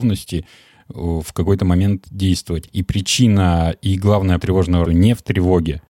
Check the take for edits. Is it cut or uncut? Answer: cut